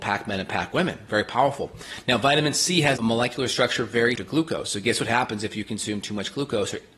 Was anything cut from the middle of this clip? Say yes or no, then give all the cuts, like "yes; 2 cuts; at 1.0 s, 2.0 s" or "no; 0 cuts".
yes; 2 cuts; at 3.0 s, 4.2 s